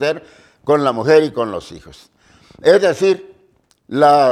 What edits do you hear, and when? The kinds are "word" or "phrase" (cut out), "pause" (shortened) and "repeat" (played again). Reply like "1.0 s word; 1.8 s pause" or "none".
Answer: none